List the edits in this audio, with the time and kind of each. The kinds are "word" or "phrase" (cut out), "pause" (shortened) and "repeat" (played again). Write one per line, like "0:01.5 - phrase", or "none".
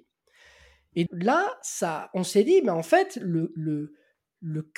0:01.1 - word
0:01.6 - word